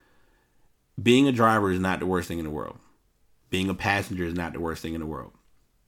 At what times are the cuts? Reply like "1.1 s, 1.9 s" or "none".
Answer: none